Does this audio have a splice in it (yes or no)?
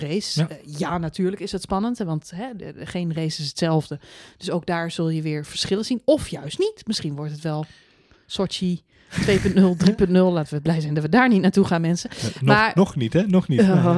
no